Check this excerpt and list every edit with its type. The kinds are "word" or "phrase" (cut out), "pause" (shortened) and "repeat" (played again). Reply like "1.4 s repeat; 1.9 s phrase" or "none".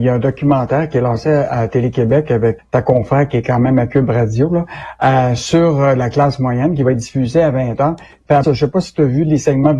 2.6 s word; 8.4 s word